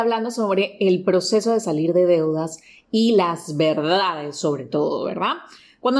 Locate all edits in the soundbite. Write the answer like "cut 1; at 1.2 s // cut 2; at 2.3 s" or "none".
none